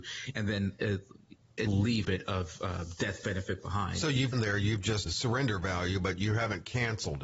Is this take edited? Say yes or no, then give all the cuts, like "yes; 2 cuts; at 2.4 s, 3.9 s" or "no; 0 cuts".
yes; 4 cuts; at 1.7 s, 2.0 s, 4.3 s, 5.1 s